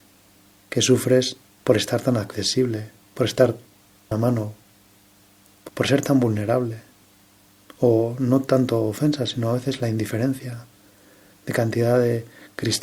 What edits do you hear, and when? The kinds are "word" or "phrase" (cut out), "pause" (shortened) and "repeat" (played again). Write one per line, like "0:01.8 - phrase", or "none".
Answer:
0:04.1 - word
0:05.7 - word
0:07.0 - pause